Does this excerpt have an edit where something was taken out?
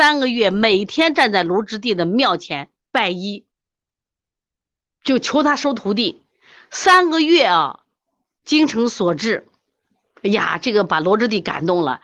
no; 0 cuts

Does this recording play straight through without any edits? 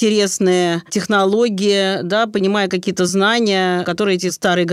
yes; 0 cuts

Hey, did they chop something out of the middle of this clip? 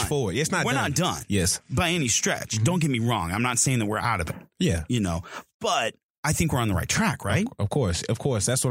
no; 0 cuts

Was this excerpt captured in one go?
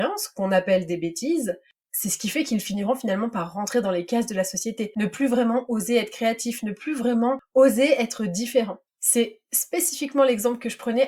yes; 0 cuts

